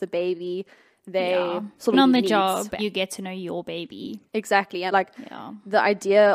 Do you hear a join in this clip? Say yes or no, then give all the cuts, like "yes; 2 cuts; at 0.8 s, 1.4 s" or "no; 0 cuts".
yes; 4 cuts; at 1.9 s, 2.8 s, 4.3 s, 4.9 s